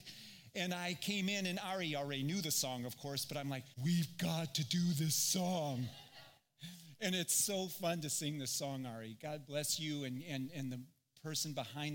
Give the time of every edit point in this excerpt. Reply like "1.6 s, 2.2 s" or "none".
3.7 s

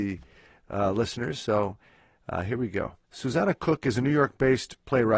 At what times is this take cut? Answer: 3.0 s

